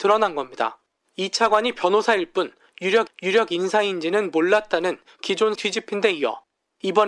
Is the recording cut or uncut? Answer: cut